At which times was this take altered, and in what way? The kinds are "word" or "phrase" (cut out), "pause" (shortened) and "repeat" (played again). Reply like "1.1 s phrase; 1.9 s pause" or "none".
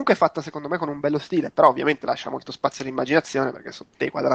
none